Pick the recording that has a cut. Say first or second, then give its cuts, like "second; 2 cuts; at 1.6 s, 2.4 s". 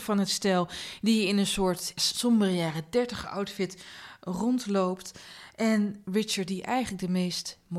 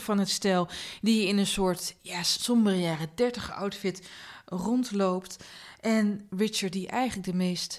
first; 1 cut; at 2.0 s